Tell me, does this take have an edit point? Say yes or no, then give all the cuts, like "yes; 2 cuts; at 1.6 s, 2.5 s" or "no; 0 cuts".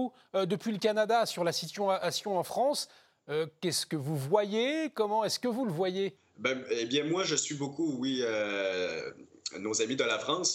no; 0 cuts